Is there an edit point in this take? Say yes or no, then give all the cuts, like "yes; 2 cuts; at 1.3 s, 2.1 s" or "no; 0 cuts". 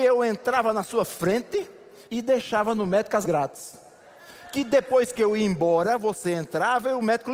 yes; 2 cuts; at 2.0 s, 3.2 s